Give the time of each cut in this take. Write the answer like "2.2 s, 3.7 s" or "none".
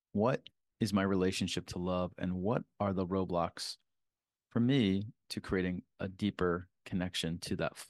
none